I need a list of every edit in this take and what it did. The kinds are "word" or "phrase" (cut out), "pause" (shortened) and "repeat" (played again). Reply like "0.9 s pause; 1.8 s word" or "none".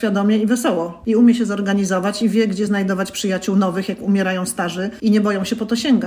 none